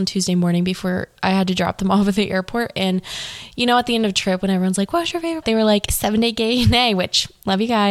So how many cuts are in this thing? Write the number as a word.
one